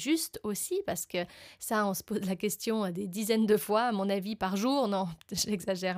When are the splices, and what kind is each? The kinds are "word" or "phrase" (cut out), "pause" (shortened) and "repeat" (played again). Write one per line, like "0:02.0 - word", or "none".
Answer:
0:04.4 - word